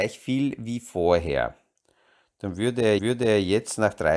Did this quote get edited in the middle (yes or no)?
yes